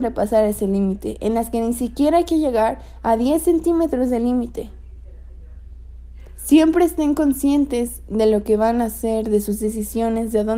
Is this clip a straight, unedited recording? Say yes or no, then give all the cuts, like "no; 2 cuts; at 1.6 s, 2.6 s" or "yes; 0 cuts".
yes; 0 cuts